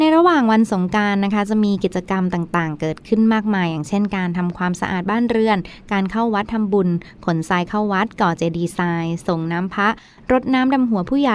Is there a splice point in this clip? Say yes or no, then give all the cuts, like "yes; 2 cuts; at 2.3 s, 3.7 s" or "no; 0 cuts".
no; 0 cuts